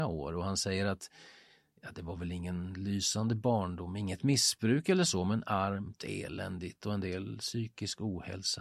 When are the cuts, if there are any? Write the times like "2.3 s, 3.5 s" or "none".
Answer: none